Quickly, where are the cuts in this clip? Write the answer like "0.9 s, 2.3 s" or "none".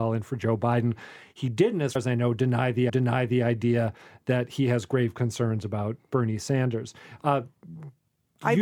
2.0 s, 2.9 s